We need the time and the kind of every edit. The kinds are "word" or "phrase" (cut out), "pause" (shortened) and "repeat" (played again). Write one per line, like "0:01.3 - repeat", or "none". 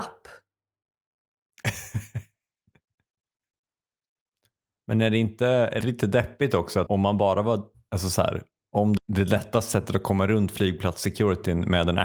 0:05.8 - word
0:06.9 - word
0:09.0 - word